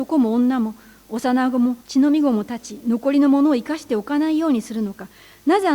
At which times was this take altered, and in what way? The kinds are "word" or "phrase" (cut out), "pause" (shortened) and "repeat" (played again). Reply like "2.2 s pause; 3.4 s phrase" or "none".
1.8 s pause